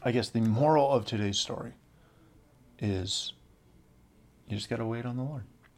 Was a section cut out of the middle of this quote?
no; 0 cuts

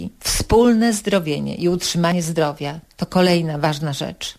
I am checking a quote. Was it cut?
no; 0 cuts

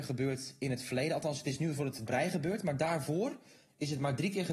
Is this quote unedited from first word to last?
no; 1 cut; at 2.1 s

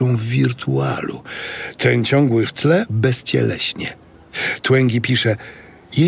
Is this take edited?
yes; 2 cuts; at 2.5 s, 2.9 s

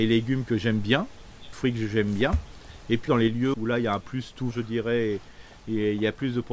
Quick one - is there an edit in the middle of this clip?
yes; 5 cuts; at 1.5 s, 3.1 s, 3.5 s, 4.0 s, 4.5 s

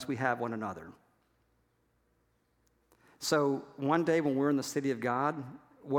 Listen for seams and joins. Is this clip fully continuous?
yes; 0 cuts

